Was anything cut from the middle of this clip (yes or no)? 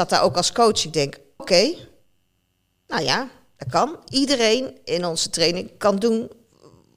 yes